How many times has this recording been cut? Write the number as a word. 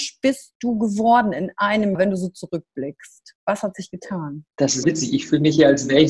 three